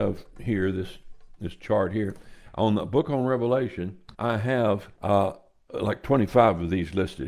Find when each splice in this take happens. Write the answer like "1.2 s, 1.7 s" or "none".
4.1 s, 5.0 s